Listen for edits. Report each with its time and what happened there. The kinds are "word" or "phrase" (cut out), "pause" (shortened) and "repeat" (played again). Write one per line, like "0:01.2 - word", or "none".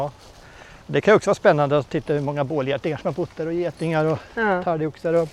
none